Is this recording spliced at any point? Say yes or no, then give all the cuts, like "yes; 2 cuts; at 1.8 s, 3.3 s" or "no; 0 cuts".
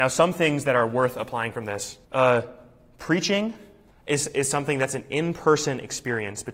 yes; 2 cuts; at 2.0 s, 3.9 s